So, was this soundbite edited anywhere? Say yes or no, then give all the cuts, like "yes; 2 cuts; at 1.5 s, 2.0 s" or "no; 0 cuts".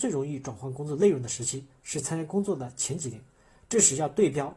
no; 0 cuts